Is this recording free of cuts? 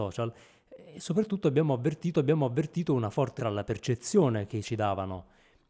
no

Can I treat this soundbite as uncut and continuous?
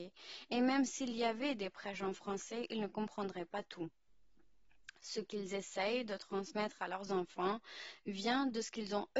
yes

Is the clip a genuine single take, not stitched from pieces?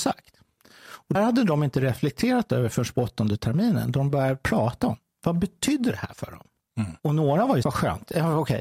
no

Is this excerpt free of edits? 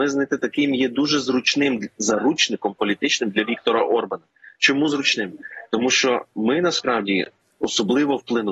yes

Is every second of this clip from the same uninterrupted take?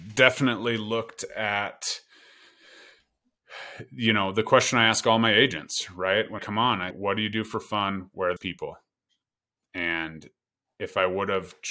no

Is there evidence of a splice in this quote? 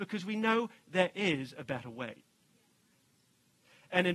no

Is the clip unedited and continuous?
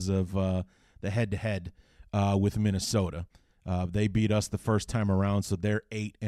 yes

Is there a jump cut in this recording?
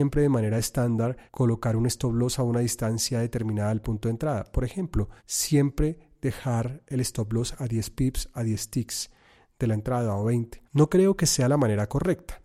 yes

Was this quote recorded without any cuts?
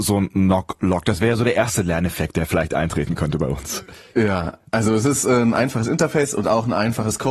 yes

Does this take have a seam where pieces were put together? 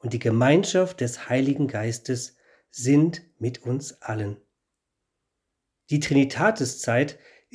no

